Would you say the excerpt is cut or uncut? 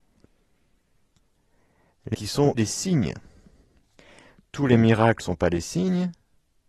cut